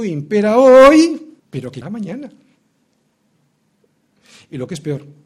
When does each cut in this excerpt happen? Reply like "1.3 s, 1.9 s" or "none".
1.4 s, 1.8 s